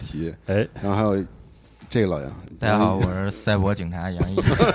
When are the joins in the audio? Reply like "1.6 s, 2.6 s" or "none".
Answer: none